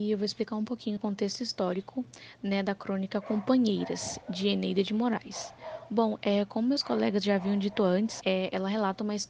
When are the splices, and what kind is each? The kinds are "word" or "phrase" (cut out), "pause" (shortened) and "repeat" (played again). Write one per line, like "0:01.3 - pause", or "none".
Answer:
0:01.0 - phrase
0:08.2 - word